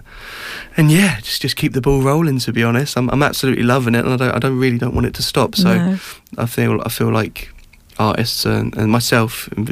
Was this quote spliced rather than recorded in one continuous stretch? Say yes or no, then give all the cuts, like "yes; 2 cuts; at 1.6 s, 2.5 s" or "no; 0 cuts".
no; 0 cuts